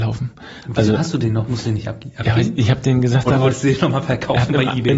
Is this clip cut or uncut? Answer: uncut